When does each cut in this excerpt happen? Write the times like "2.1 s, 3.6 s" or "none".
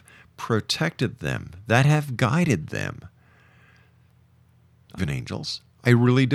5.0 s